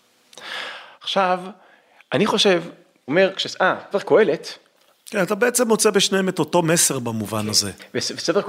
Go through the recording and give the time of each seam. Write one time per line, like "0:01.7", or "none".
0:03.1
0:03.9